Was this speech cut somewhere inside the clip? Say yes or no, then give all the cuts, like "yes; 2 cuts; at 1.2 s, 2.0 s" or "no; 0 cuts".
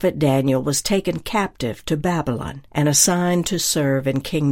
yes; 1 cut; at 2.7 s